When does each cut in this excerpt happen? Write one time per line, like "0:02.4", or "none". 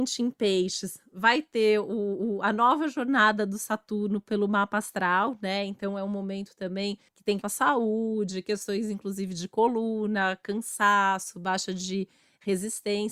0:07.1
0:07.4